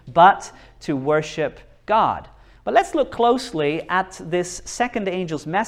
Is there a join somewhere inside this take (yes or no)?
no